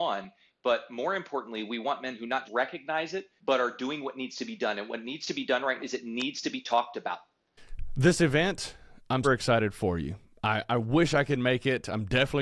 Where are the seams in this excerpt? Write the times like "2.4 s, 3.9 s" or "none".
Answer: 2.5 s, 3.4 s, 5.8 s, 9.2 s

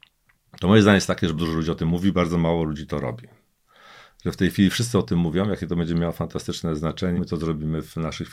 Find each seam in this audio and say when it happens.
1.4 s, 7.1 s

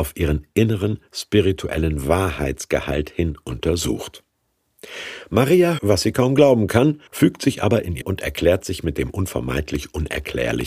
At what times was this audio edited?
5.8 s, 7.1 s, 8.0 s

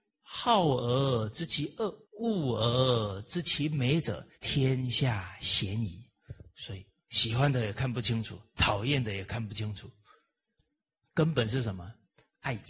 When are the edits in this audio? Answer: 2.0 s, 4.3 s

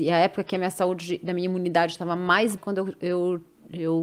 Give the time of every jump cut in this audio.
2.6 s

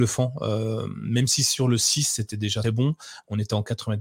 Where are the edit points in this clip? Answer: 2.6 s

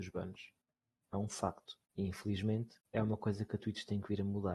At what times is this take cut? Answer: 1.9 s, 2.8 s

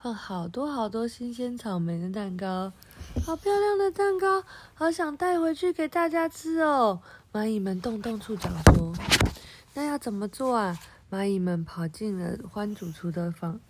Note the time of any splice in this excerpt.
none

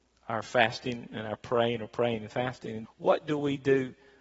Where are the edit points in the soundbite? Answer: 2.8 s

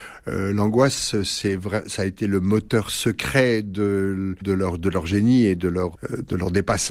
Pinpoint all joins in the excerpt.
none

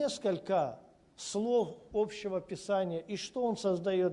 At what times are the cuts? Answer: 1.9 s

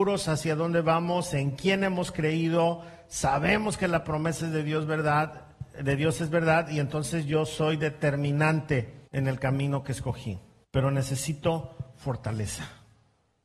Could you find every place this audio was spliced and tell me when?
9.1 s, 10.6 s

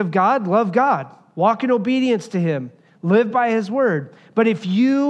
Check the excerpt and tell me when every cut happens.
none

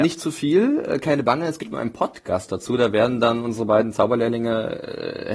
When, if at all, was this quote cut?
none

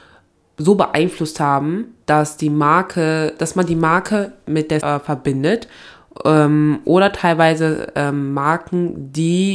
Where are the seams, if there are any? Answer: 2.0 s, 4.8 s

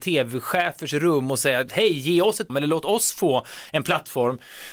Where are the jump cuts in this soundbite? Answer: 2.5 s

